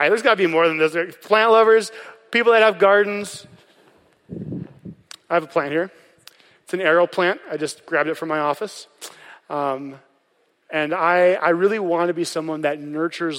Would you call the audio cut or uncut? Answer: uncut